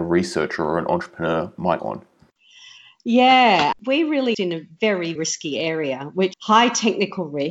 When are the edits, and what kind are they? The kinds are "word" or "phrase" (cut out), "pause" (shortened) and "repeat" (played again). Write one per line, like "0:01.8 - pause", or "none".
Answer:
0:01.8 - word
0:03.7 - word
0:04.3 - word
0:05.2 - word
0:06.3 - word